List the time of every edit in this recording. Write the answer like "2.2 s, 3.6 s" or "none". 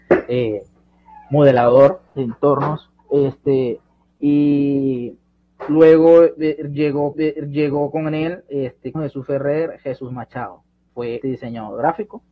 2.1 s, 3.0 s, 7.1 s, 8.9 s, 10.9 s, 11.2 s